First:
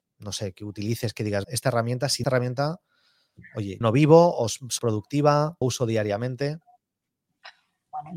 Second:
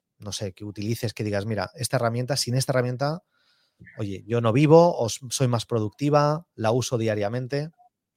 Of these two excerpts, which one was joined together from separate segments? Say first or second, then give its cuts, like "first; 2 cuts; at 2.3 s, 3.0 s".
first; 5 cuts; at 1.4 s, 2.2 s, 3.8 s, 4.8 s, 5.6 s